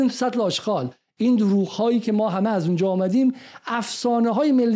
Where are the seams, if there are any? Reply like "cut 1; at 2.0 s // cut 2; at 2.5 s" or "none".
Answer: none